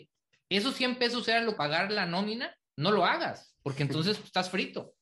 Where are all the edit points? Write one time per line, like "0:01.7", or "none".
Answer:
0:01.6
0:02.7